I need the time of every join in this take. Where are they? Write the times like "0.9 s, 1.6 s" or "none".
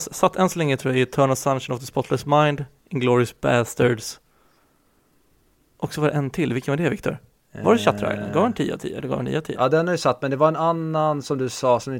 none